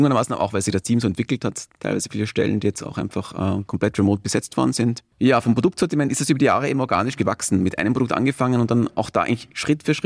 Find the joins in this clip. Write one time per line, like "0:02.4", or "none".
0:05.1